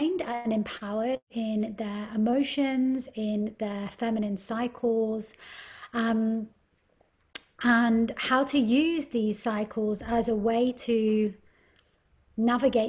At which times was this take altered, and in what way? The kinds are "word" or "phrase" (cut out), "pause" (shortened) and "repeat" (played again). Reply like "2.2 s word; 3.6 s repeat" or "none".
none